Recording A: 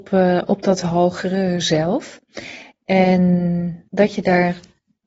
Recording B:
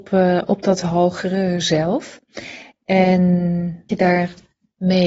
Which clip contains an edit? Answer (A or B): B